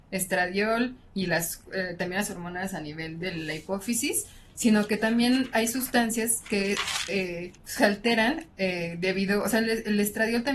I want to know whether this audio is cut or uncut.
cut